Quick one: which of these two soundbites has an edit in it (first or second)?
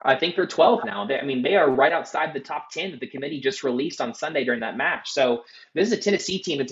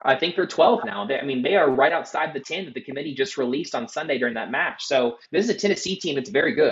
second